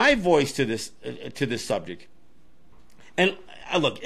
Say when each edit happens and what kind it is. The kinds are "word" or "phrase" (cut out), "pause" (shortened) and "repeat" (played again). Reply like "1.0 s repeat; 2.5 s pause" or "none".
none